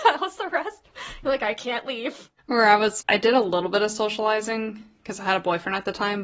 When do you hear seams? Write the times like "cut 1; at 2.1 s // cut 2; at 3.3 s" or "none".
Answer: cut 1; at 2.4 s // cut 2; at 3.0 s